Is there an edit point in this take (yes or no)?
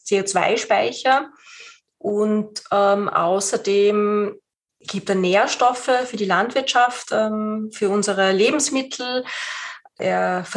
no